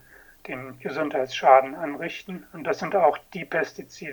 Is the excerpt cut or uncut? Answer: uncut